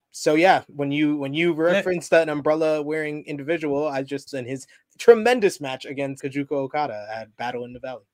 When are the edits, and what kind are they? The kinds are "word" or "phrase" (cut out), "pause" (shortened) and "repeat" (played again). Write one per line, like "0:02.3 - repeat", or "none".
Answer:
0:04.3 - phrase
0:06.2 - word